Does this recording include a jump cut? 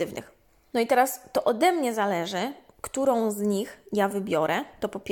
no; 0 cuts

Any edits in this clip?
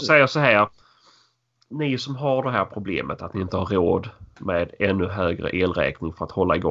no; 0 cuts

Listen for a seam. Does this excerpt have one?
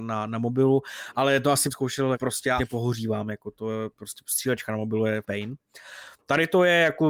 yes; 4 cuts; at 1.7 s, 2.1 s, 2.6 s, 5.2 s

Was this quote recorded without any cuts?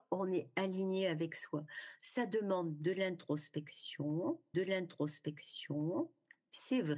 no; 1 cut; at 4.5 s

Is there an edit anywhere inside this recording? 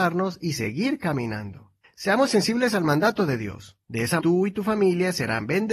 yes; 3 cuts; at 1.8 s, 3.8 s, 4.2 s

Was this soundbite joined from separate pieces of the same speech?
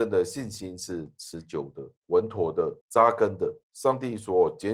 yes; 3 cuts; at 2.0 s, 2.8 s, 3.6 s

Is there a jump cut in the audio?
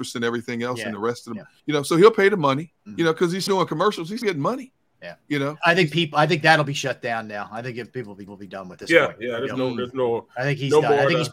yes; 7 cuts; at 1.6 s, 2.8 s, 3.5 s, 4.2 s, 5.6 s, 8.3 s, 8.8 s

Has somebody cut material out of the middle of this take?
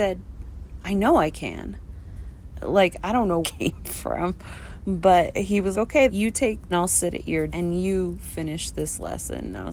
yes; 6 cuts; at 3.4 s, 5.3 s, 5.7 s, 6.1 s, 6.7 s, 7.5 s

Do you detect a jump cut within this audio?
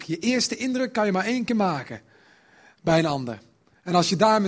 no; 0 cuts

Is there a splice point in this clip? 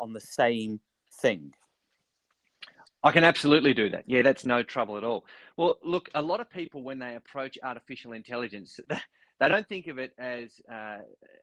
no; 0 cuts

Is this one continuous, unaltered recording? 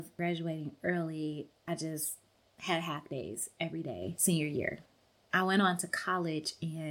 yes; 0 cuts

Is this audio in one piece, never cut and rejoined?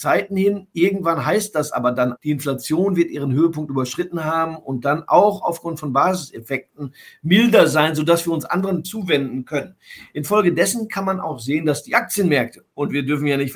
no; 2 cuts; at 2.2 s, 8.8 s

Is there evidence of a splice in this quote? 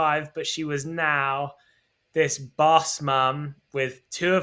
no; 0 cuts

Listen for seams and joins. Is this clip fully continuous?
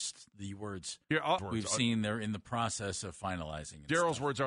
no; 2 cuts; at 1.0 s, 1.4 s

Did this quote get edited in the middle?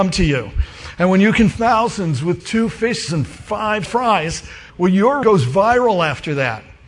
yes; 6 cuts; at 1.5 s, 2.4 s, 3.1 s, 3.8 s, 4.7 s, 5.2 s

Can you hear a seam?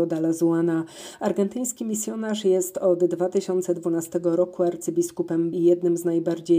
yes; 1 cut; at 5.5 s

